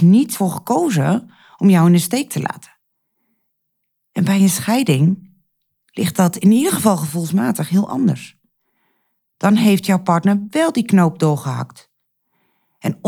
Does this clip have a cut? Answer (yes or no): no